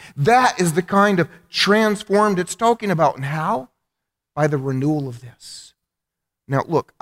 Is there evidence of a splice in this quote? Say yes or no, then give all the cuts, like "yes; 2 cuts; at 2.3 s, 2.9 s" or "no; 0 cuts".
no; 0 cuts